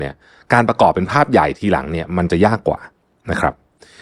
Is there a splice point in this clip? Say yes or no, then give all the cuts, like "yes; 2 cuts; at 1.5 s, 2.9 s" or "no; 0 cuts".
no; 0 cuts